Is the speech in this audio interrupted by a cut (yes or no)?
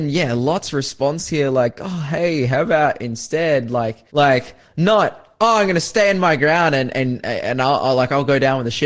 yes